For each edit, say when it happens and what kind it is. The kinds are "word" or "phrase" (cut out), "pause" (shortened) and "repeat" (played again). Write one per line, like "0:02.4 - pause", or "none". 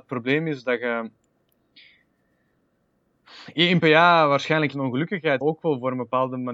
0:03.8 - word
0:04.7 - word
0:05.4 - word